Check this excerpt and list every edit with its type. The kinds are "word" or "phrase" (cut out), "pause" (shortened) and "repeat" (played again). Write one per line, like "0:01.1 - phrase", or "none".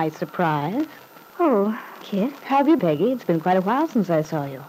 0:02.0 - word
0:02.8 - word